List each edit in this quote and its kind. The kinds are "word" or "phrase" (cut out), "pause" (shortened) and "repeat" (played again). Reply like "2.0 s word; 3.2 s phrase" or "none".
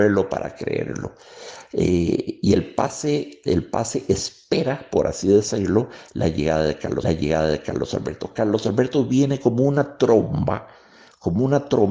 7.0 s repeat